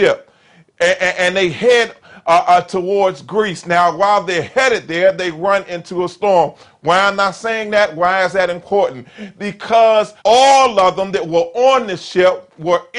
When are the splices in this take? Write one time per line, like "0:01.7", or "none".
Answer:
0:10.2